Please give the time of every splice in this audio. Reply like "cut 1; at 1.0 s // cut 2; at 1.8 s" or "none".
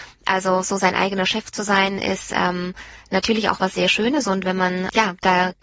none